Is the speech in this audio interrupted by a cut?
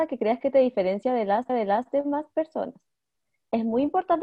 yes; 1 cut; at 1.5 s

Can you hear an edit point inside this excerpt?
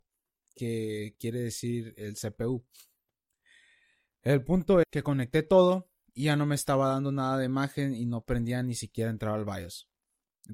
yes; 1 cut; at 4.8 s

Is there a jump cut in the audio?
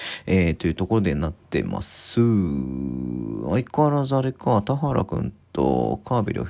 no; 0 cuts

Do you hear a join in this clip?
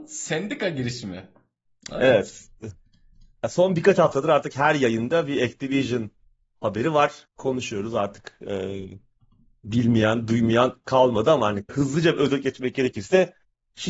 yes; 1 cut; at 11.7 s

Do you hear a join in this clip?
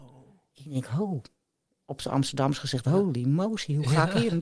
no; 0 cuts

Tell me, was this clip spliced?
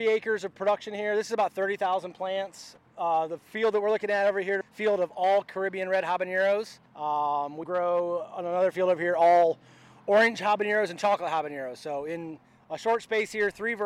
yes; 4 cuts; at 3.4 s, 4.6 s, 6.9 s, 7.6 s

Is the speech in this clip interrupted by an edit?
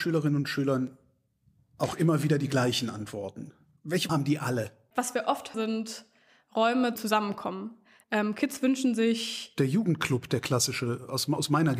yes; 3 cuts; at 4.1 s, 5.5 s, 7.0 s

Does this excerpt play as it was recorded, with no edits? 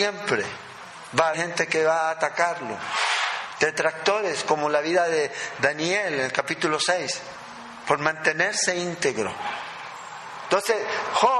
no; 1 cut; at 1.3 s

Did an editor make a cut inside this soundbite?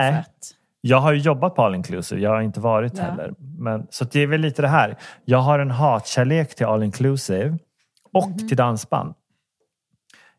no; 0 cuts

